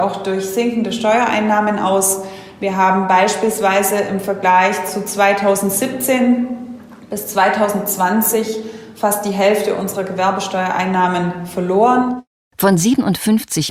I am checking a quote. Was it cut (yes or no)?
no